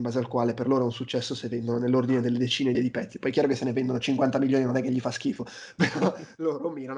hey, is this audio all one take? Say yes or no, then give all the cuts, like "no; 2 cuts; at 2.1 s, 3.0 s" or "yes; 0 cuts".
no; 1 cut; at 2.7 s